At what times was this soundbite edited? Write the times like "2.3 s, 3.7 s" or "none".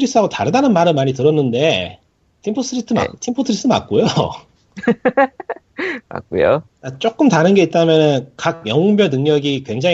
2.2 s